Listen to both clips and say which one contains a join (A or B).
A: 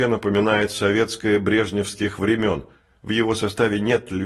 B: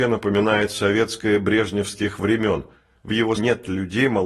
B